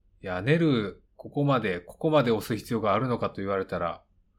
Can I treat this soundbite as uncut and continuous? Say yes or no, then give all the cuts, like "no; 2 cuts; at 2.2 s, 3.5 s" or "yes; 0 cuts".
no; 1 cut; at 1.1 s